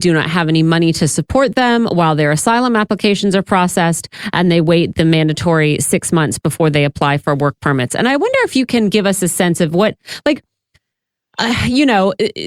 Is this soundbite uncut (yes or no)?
yes